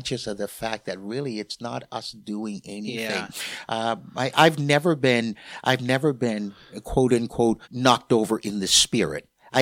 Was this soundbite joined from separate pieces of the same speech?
yes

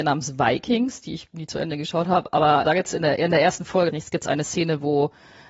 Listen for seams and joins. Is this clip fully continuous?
no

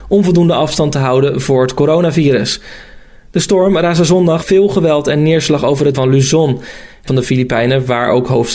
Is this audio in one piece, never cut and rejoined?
no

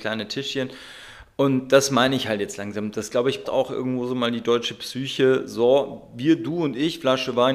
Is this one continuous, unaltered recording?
no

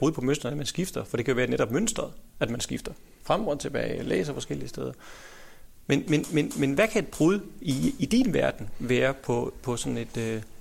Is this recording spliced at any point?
no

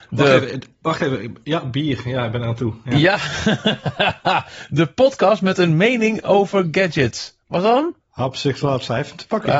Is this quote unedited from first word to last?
no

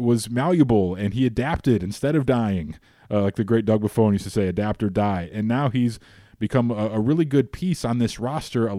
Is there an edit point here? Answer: no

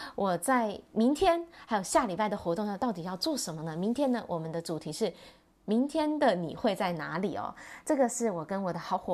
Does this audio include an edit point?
no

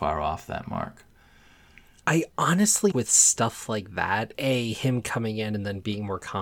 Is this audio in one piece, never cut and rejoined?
no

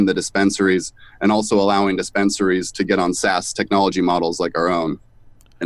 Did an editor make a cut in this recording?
no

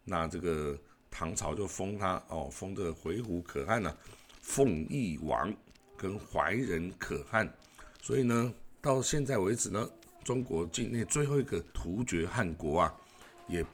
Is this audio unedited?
no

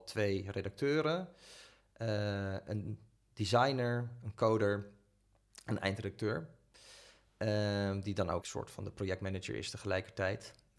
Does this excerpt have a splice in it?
yes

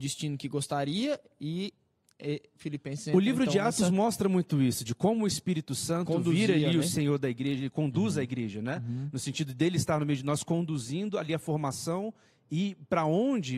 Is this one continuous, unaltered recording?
yes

